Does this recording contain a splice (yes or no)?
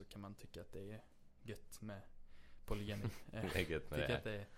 no